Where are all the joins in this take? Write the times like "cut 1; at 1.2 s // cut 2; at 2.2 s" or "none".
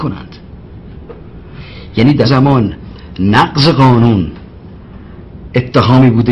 cut 1; at 2.2 s